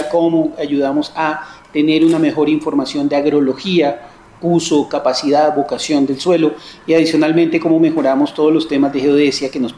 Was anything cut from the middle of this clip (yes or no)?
no